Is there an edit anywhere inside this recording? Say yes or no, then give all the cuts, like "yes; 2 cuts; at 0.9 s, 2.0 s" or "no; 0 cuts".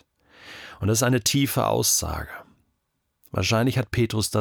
no; 0 cuts